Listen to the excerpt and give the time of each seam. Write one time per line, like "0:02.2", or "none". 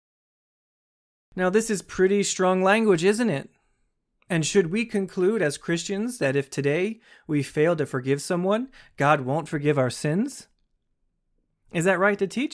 none